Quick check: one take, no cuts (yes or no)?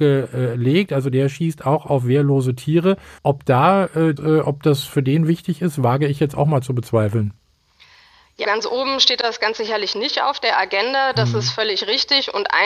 no